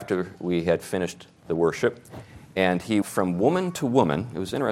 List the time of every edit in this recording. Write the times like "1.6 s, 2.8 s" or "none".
3.0 s